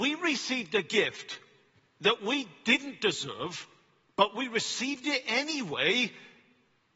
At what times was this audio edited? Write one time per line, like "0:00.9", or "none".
none